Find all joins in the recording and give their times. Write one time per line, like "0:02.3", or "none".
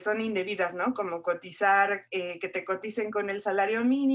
none